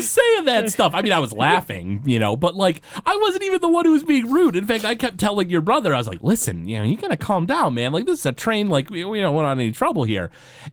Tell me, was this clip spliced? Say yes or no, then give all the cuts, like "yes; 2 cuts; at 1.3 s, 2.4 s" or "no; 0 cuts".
no; 0 cuts